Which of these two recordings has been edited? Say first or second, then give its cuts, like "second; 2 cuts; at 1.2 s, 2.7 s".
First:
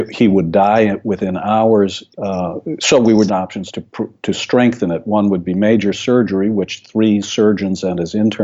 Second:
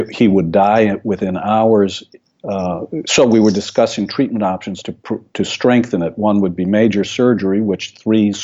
first; 2 cuts; at 2.1 s, 3.3 s